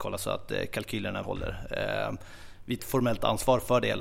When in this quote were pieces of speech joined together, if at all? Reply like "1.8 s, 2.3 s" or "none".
1.2 s, 2.8 s